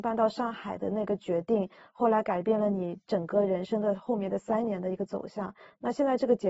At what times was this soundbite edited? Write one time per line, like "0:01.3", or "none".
none